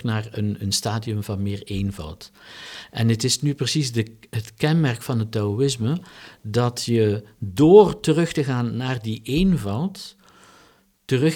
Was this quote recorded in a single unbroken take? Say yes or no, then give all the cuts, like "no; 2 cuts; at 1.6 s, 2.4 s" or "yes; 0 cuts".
yes; 0 cuts